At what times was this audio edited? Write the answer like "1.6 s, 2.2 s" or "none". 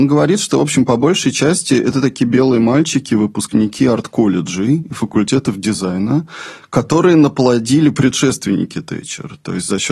none